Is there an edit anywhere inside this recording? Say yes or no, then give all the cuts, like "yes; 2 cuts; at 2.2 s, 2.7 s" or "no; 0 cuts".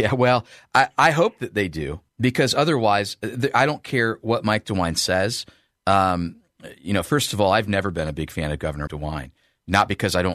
yes; 2 cuts; at 2.1 s, 8.9 s